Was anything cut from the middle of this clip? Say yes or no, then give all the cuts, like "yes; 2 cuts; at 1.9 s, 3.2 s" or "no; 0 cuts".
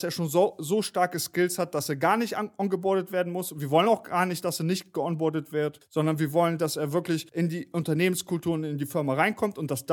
no; 0 cuts